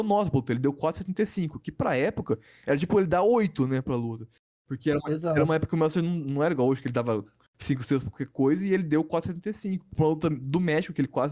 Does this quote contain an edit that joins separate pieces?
no; 0 cuts

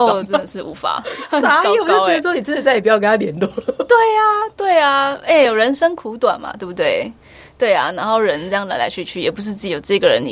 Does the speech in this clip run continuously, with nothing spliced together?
yes; 0 cuts

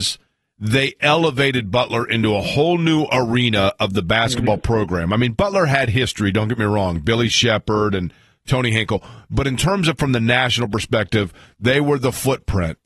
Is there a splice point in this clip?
no; 0 cuts

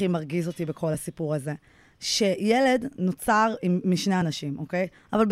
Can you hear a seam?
no; 0 cuts

